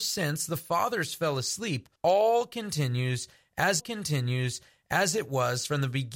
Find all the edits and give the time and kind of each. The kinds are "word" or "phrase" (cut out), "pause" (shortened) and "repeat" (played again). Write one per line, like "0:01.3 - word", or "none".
0:02.0 - pause
0:03.8 - repeat